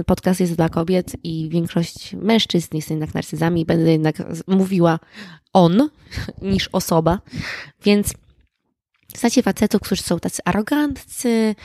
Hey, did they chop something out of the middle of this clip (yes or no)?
no